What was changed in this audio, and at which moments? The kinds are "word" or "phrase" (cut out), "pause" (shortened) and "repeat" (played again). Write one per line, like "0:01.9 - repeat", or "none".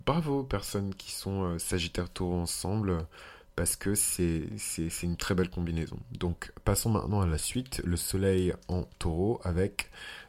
none